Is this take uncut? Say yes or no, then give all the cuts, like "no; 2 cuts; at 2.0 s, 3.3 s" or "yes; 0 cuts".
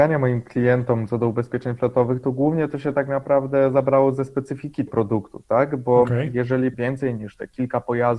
no; 2 cuts; at 4.9 s, 6.7 s